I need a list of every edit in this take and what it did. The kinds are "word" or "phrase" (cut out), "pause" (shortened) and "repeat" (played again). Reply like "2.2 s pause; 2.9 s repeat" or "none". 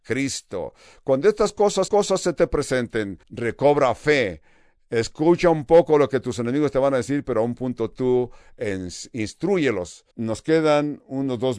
1.9 s repeat; 3.2 s pause; 10.1 s pause